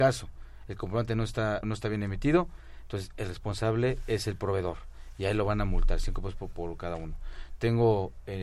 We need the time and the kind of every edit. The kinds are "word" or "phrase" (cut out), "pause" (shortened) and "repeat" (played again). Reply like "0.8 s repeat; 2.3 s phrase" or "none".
1.6 s word